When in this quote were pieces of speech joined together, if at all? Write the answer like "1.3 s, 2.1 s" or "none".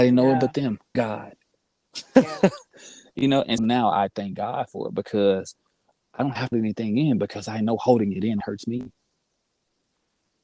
0.9 s, 3.6 s, 6.5 s, 8.4 s